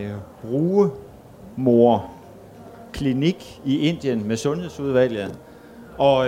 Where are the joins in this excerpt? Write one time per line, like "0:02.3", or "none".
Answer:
none